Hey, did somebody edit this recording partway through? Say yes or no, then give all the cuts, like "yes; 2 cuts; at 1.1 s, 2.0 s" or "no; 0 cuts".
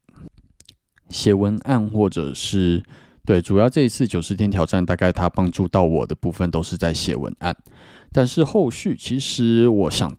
no; 0 cuts